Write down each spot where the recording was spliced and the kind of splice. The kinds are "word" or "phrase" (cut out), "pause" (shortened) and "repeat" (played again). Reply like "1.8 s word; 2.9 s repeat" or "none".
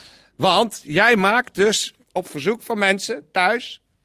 2.0 s pause